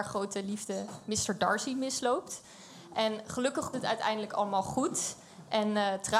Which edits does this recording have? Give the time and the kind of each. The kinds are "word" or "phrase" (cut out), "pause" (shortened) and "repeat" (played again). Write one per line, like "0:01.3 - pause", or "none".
0:03.7 - word